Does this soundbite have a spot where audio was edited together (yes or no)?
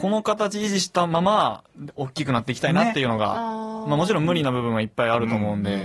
no